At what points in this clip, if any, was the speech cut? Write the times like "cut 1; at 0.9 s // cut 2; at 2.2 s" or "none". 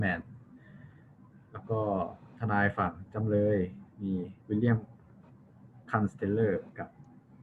cut 1; at 4.4 s